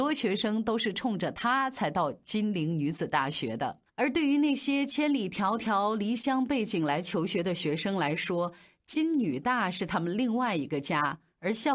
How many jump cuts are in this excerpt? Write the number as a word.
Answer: one